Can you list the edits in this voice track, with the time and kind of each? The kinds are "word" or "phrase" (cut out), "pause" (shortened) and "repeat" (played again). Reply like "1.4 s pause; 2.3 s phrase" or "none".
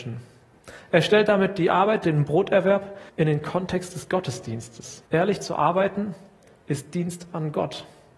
3.1 s pause; 5.0 s pause

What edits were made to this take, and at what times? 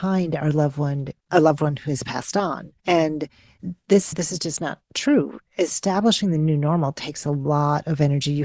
1.2 s pause; 2.8 s pause; 4.1 s phrase

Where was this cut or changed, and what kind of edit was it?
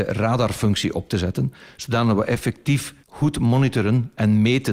3.0 s pause

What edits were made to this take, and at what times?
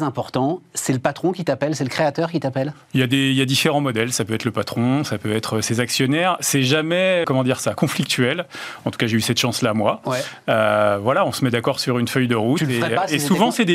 7.2 s word

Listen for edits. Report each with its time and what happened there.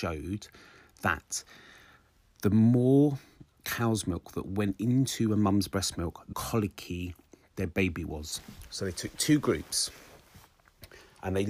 6.3 s word

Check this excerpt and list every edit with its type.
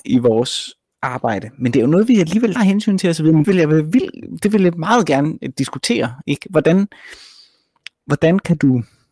2.6 s word; 3.4 s word

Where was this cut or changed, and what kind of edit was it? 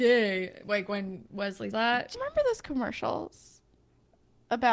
1.7 s word; 2.1 s word

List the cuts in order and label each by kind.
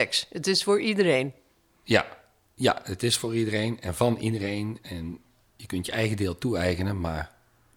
none

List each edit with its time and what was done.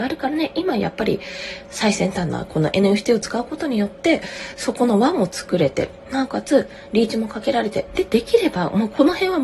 none

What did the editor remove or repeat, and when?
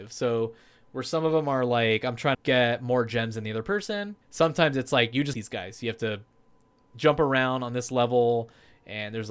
2.3 s word; 4.2 s pause; 5.3 s phrase

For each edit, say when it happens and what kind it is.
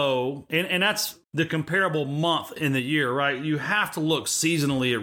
1.2 s word

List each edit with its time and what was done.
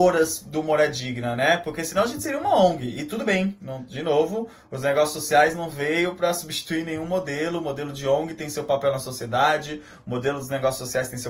none

